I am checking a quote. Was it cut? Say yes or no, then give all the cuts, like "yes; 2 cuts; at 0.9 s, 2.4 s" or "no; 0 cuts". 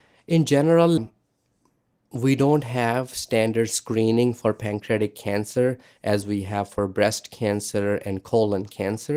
yes; 1 cut; at 1.0 s